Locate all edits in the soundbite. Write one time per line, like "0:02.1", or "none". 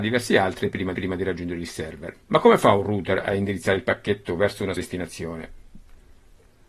0:00.9
0:02.2
0:04.8

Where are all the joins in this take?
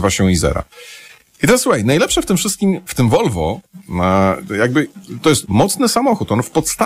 0:02.9
0:05.2

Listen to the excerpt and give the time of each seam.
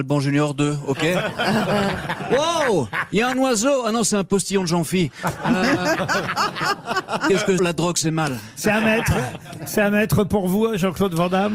0:07.6

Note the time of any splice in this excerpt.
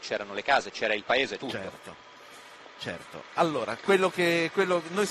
0:01.4

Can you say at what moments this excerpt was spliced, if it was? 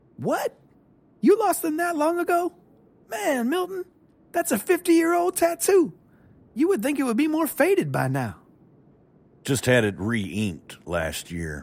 none

